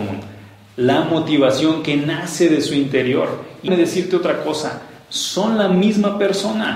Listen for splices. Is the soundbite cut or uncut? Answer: cut